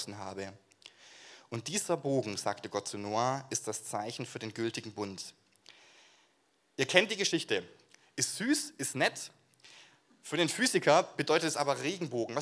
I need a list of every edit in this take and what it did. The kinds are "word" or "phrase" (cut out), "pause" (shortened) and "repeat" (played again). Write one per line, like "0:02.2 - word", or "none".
none